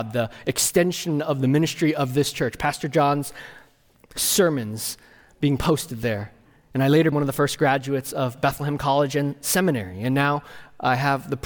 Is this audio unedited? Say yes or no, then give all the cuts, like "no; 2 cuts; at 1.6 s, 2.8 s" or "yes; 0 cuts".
no; 1 cut; at 7.1 s